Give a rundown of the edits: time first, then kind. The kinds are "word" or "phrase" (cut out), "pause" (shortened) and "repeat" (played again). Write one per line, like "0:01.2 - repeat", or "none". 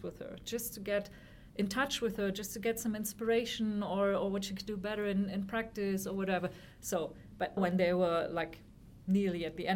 0:07.6 - word

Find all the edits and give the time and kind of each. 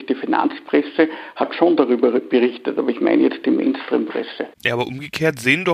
0:04.5 - pause

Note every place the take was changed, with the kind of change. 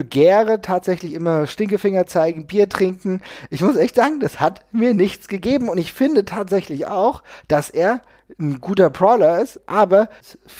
none

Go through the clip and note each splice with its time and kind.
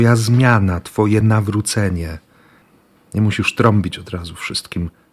none

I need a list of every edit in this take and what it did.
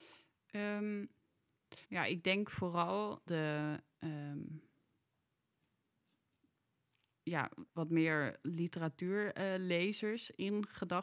0:01.8 - pause
0:03.3 - phrase
0:07.7 - pause

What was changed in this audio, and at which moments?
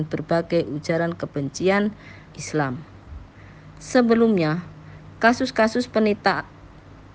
0:02.3 - word

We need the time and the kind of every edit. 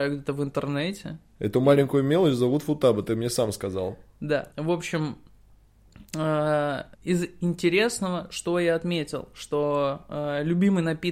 0:04.5 - pause
0:06.9 - pause

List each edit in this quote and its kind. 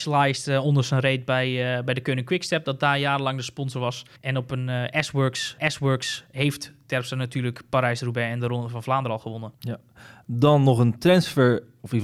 0:04.2 - pause
0:05.6 - repeat
0:09.5 - pause

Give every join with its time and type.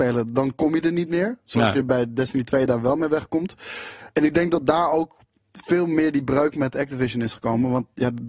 0:04.1 - pause

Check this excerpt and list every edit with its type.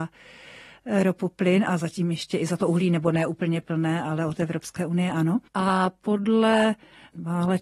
0:05.5 - pause

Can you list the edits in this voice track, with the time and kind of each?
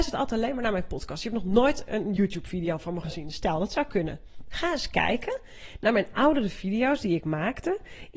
none

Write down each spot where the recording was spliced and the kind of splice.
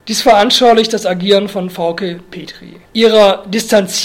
0:02.8 - pause

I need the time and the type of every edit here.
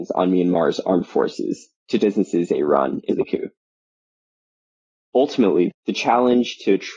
0:02.0 - word
0:03.1 - word
0:05.7 - word

